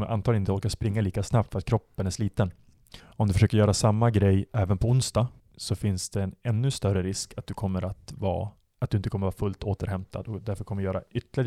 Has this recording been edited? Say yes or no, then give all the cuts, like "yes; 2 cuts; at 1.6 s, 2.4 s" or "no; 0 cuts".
yes; 3 cuts; at 3.0 s, 5.4 s, 8.7 s